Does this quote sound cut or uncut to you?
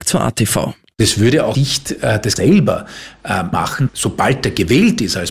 cut